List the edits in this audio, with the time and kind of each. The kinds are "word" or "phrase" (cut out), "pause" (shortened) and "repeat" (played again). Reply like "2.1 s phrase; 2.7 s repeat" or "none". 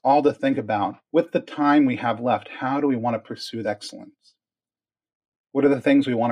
1.0 s pause; 3.6 s word